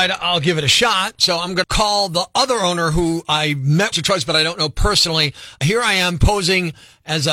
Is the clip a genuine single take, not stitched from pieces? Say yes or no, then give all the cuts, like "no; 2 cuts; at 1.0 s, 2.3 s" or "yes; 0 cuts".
no; 2 cuts; at 1.6 s, 3.9 s